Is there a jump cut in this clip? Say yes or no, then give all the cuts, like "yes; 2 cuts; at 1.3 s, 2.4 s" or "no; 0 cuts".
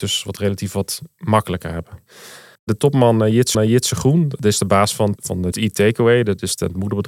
yes; 4 cuts; at 2.6 s, 3.5 s, 5.2 s, 5.5 s